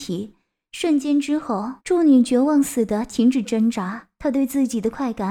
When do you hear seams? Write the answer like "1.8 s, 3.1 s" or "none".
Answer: 1.8 s